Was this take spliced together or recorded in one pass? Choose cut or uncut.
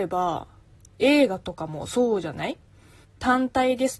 cut